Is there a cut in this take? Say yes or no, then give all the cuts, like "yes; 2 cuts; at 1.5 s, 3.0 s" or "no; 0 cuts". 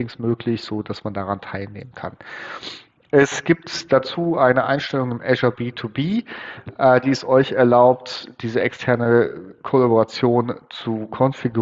no; 0 cuts